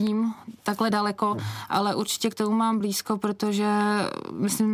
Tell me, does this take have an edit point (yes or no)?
no